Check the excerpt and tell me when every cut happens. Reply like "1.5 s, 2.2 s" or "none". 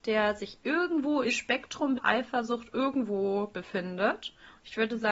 1.3 s, 2.0 s